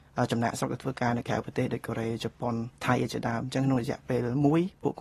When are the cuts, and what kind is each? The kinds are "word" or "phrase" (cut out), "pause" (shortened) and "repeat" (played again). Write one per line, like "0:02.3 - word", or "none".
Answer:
0:02.8 - pause